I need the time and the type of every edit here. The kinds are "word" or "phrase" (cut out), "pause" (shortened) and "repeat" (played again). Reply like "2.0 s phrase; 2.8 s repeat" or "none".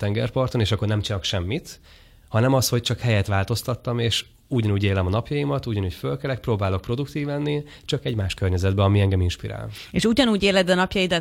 none